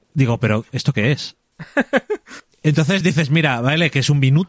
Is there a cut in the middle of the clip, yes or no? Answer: no